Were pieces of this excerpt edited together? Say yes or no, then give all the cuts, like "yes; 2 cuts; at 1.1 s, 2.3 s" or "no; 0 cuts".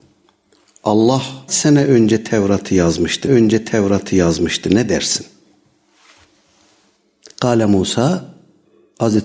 yes; 2 cuts; at 1.5 s, 3.3 s